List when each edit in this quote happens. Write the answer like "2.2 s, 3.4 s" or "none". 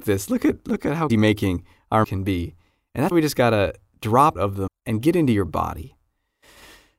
1.1 s, 2.0 s, 3.1 s, 4.3 s, 4.7 s